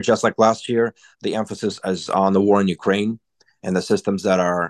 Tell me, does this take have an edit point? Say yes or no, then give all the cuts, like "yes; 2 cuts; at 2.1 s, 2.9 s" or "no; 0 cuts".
no; 0 cuts